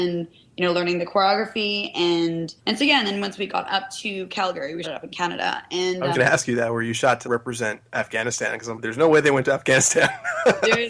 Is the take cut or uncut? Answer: cut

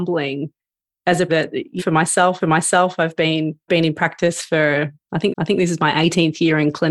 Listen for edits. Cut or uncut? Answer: cut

